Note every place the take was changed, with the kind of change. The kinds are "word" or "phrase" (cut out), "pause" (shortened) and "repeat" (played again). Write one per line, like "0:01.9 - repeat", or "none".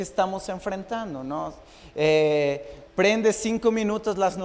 0:02.9 - pause